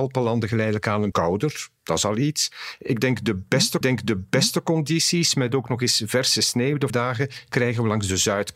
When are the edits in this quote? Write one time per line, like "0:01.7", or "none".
0:01.1
0:01.8
0:03.8
0:06.9